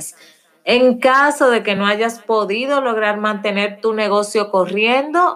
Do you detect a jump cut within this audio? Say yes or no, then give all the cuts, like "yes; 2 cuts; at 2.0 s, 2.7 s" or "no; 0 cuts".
no; 0 cuts